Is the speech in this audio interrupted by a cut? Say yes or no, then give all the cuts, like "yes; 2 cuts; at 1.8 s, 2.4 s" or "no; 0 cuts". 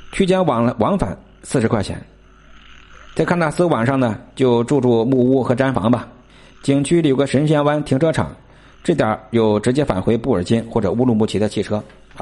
no; 0 cuts